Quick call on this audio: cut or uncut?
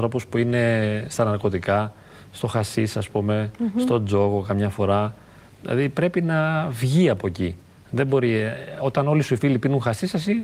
uncut